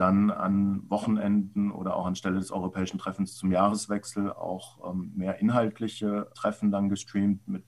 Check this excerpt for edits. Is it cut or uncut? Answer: uncut